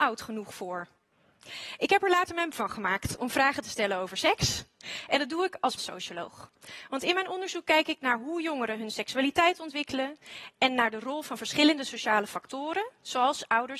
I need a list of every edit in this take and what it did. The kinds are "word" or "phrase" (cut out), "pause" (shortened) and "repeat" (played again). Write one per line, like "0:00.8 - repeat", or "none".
0:02.5 - word
0:05.8 - phrase